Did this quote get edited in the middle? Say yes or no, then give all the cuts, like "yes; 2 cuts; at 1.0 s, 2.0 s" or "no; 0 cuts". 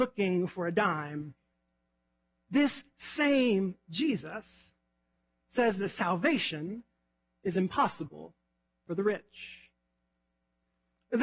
no; 0 cuts